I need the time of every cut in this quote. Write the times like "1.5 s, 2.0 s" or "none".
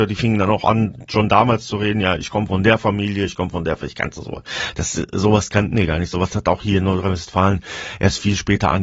none